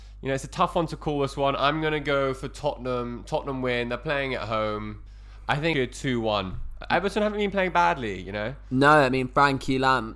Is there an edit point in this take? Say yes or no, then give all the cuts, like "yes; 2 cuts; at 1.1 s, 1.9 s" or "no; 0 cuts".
yes; 1 cut; at 5.7 s